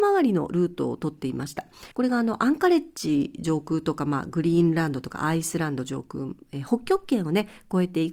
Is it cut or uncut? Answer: cut